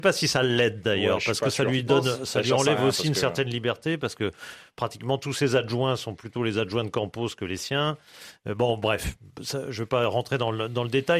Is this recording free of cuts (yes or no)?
yes